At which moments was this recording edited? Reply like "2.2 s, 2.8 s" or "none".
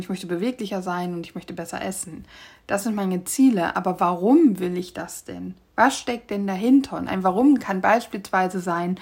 none